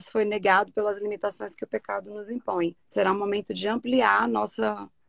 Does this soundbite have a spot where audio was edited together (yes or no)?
yes